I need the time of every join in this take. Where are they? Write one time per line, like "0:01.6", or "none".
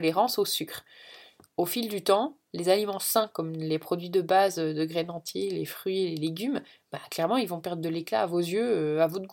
none